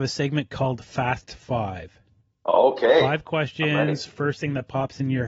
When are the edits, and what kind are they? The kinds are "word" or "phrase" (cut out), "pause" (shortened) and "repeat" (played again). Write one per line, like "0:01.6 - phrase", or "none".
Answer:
0:02.2 - pause